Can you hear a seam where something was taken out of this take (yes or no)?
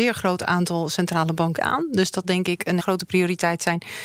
yes